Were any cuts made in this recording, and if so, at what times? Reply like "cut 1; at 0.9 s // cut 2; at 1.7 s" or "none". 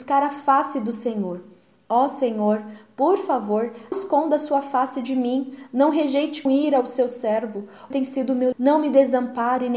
cut 1; at 3.9 s // cut 2; at 6.5 s // cut 3; at 7.9 s // cut 4; at 8.5 s